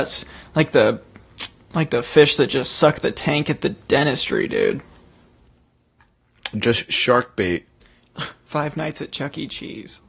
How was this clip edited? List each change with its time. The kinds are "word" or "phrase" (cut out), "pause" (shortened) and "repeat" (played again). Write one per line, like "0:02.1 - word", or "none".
none